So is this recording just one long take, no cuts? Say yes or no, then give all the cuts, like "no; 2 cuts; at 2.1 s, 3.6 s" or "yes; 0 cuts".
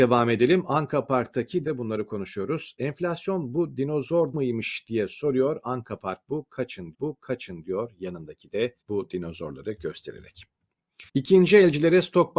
no; 5 cuts; at 1.6 s, 4.3 s, 6.9 s, 8.8 s, 11.1 s